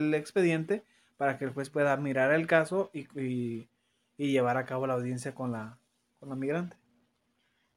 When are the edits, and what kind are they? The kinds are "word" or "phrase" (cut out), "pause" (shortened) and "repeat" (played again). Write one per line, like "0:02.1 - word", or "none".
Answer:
none

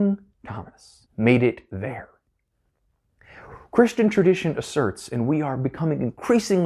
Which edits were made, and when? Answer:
0:01.1 - pause

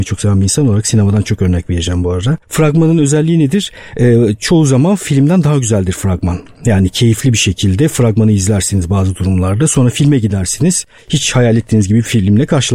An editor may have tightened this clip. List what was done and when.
0:02.4 - pause

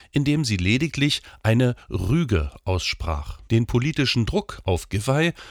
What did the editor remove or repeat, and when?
0:03.5 - pause

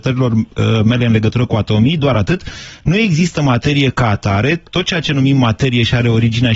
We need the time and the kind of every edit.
none

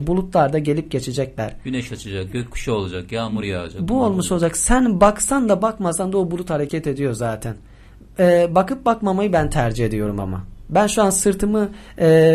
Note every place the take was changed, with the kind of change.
none

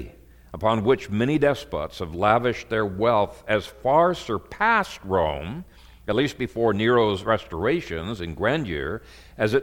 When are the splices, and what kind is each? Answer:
none

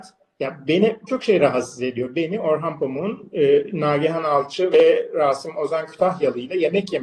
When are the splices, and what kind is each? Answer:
0:01.1 - word

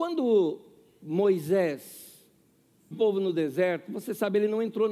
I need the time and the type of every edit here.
0:02.9 - word

